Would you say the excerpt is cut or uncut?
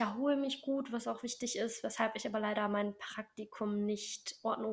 uncut